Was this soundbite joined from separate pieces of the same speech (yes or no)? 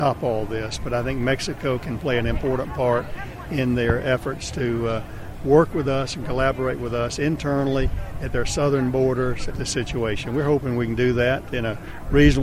yes